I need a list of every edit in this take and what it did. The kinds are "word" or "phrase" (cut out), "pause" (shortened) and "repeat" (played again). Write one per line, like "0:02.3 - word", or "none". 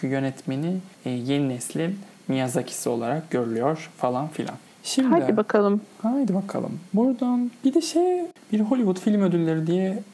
0:00.9 - pause